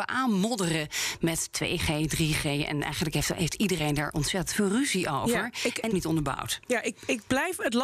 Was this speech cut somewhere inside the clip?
yes; 1 cut; at 5.9 s

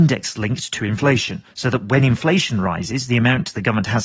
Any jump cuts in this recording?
yes; 1 cut; at 1.5 s

